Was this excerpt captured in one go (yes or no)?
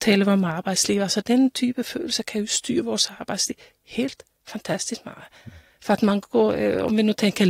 yes